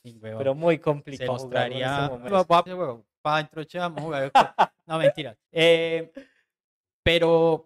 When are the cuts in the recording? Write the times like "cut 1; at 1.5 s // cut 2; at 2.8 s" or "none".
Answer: cut 1; at 1.3 s // cut 2; at 2.3 s // cut 3; at 2.7 s // cut 4; at 5.5 s